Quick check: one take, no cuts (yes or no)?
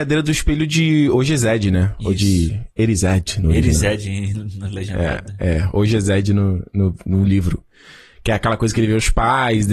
yes